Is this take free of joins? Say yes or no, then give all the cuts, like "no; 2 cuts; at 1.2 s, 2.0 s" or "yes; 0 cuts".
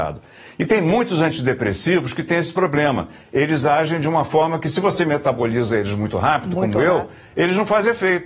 yes; 0 cuts